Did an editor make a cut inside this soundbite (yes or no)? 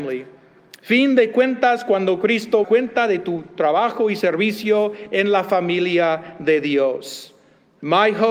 yes